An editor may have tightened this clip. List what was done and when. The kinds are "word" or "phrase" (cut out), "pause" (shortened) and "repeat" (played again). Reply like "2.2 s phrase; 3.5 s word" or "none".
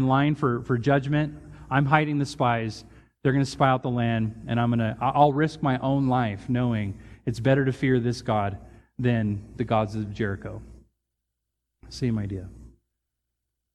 none